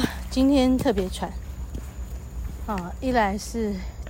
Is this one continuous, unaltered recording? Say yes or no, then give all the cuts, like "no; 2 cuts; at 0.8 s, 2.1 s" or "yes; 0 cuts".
yes; 0 cuts